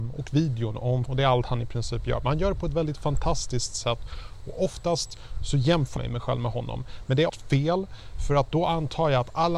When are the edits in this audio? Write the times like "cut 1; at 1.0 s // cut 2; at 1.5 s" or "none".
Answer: cut 1; at 1.1 s // cut 2; at 6.0 s // cut 3; at 7.3 s